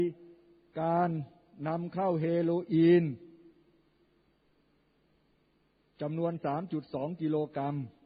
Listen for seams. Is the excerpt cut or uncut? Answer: uncut